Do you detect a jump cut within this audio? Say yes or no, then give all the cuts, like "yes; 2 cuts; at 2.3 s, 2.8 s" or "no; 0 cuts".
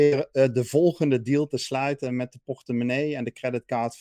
no; 0 cuts